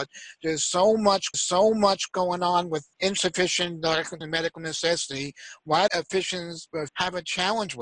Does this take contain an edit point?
yes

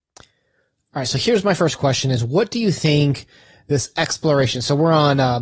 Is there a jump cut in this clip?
no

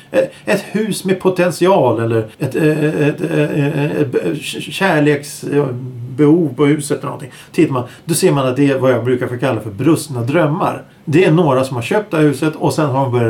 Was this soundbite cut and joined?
yes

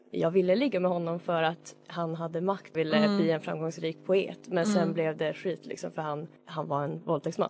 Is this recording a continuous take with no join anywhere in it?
no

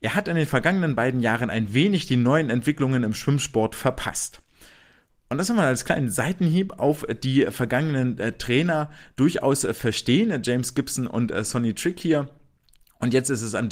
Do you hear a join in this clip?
no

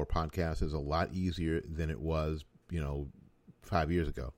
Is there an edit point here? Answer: no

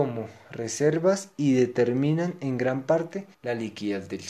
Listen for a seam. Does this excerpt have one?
yes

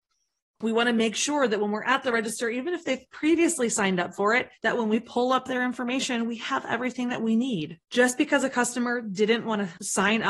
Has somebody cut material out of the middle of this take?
yes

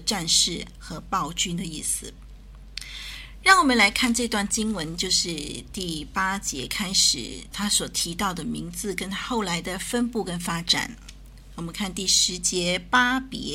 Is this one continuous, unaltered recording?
no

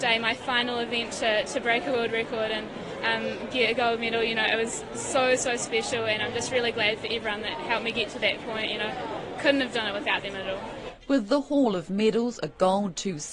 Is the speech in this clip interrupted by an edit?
no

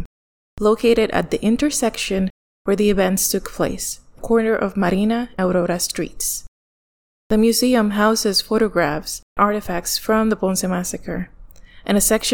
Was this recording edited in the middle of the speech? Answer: yes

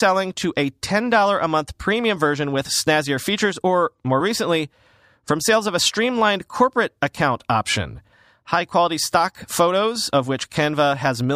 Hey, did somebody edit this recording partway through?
no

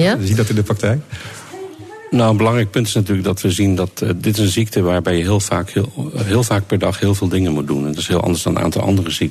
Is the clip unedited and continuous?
yes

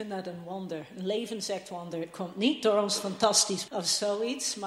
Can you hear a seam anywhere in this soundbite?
yes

